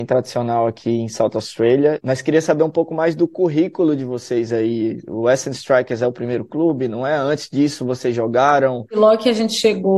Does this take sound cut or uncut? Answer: uncut